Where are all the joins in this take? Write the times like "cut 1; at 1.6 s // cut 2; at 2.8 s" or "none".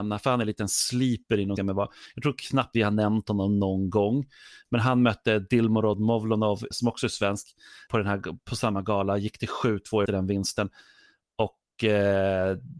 cut 1; at 1.6 s // cut 2; at 2.7 s // cut 3; at 6.7 s // cut 4; at 7.9 s // cut 5; at 10.1 s